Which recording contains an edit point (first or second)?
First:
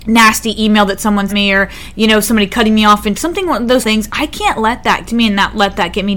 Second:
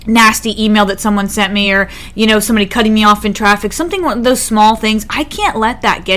first